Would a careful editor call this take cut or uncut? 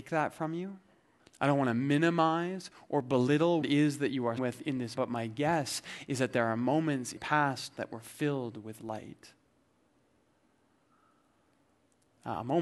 cut